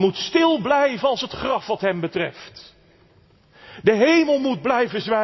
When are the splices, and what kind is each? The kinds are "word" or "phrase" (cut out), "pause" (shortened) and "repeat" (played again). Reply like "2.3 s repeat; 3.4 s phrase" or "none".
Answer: none